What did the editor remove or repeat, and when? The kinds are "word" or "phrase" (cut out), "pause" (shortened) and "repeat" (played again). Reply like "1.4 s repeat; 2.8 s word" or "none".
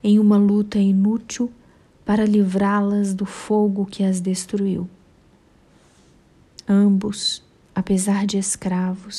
none